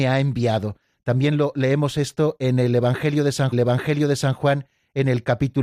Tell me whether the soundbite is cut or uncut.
cut